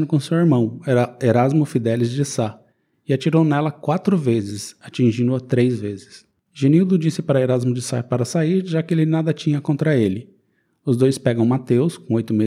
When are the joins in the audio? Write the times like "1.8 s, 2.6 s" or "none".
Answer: none